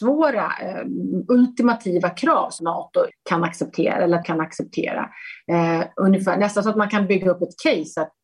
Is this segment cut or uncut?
cut